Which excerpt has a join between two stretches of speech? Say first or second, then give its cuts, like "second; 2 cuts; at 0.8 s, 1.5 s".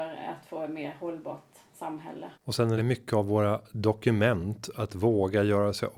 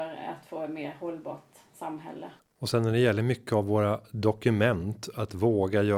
first; 2 cuts; at 2.3 s, 2.8 s